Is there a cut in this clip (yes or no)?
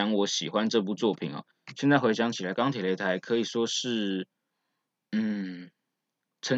no